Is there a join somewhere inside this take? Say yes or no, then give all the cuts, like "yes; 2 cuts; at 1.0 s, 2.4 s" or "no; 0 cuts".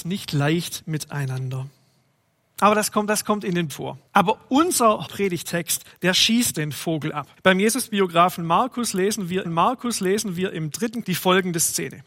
yes; 8 cuts; at 3.1 s, 3.7 s, 4.1 s, 5.1 s, 6.5 s, 7.4 s, 9.4 s, 11.0 s